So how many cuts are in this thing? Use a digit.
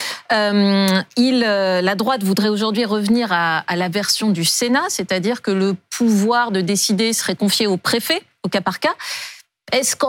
0